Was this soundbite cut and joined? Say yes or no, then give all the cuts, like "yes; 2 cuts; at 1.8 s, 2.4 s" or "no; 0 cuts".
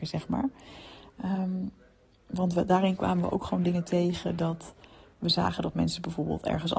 no; 0 cuts